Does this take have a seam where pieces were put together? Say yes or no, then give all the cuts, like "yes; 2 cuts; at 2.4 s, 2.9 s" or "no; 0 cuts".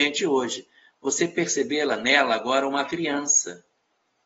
no; 0 cuts